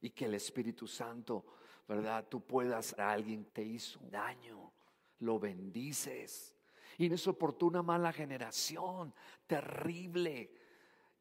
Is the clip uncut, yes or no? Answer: no